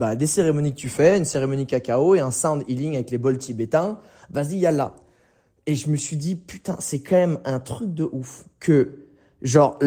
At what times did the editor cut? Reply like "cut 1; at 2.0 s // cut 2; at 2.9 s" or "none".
none